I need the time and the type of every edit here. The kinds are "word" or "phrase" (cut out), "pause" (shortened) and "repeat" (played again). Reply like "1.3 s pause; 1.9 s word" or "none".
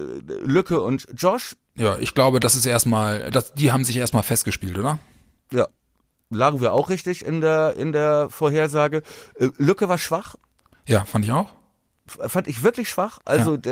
none